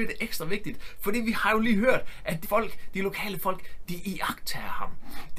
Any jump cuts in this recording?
yes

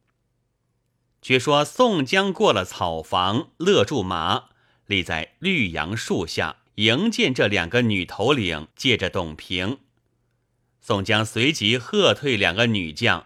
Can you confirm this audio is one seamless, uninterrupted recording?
no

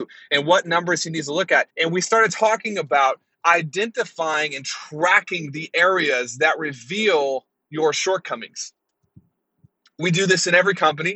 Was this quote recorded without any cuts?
no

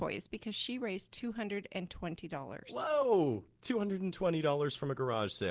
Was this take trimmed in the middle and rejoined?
no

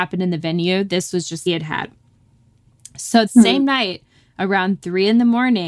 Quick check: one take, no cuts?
no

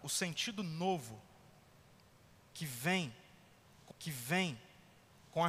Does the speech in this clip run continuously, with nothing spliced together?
no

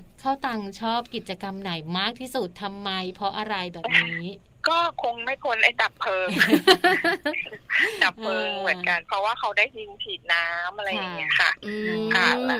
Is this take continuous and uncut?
no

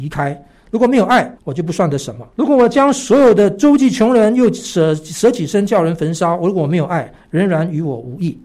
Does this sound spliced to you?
yes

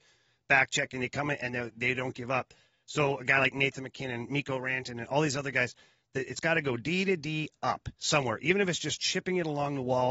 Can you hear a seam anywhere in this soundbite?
no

